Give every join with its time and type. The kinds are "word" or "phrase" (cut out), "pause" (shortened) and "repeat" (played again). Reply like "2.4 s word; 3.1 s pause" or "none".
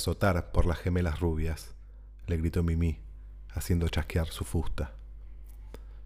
none